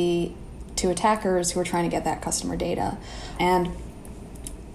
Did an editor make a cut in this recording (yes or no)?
no